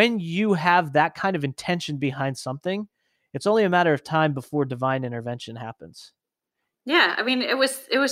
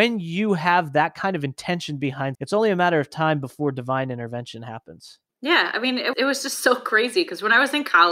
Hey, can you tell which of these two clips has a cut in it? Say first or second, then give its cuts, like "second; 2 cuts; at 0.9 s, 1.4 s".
second; 3 cuts; at 2.3 s, 5.3 s, 6.1 s